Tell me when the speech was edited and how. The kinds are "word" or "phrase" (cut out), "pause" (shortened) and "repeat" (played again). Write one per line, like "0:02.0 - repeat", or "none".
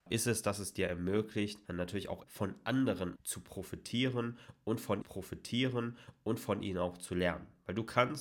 0:01.7 - pause
0:02.2 - word
0:03.2 - word
0:05.0 - repeat